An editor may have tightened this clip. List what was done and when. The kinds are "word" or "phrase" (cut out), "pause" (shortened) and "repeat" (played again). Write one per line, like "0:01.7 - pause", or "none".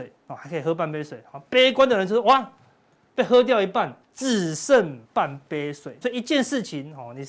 0:04.0 - pause
0:05.0 - pause
0:06.0 - word